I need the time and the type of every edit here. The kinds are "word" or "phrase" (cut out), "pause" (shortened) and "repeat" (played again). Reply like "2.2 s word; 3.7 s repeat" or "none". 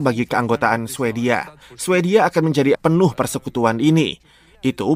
2.7 s word